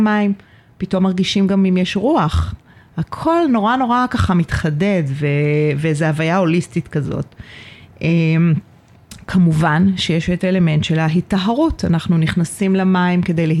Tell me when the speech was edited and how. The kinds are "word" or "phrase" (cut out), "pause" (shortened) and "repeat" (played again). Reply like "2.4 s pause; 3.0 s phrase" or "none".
none